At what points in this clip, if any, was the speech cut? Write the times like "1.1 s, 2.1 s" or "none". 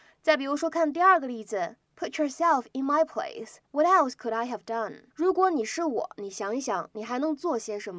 1.8 s, 3.6 s, 5.1 s